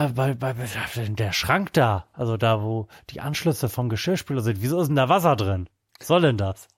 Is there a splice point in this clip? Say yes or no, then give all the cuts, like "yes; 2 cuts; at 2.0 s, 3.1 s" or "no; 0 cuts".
no; 0 cuts